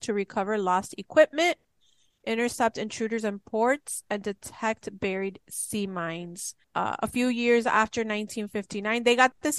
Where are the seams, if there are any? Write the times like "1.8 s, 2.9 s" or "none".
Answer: 6.6 s